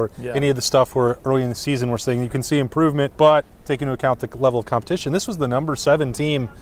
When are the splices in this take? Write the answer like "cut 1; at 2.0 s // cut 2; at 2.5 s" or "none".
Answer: cut 1; at 3.5 s